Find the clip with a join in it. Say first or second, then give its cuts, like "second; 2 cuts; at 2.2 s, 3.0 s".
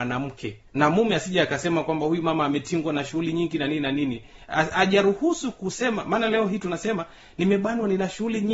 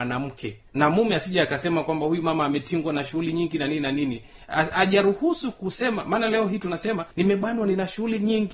second; 1 cut; at 7.1 s